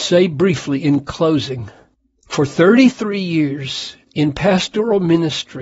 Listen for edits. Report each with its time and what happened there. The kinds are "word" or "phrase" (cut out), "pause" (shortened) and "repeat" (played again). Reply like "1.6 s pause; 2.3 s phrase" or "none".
4.0 s pause